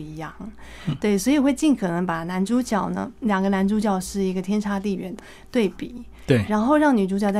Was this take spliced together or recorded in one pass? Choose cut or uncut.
uncut